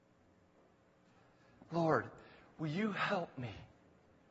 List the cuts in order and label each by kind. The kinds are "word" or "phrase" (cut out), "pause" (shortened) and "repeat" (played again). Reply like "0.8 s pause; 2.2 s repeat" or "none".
none